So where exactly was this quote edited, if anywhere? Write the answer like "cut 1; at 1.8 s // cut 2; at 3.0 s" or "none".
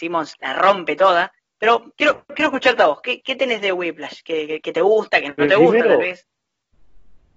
none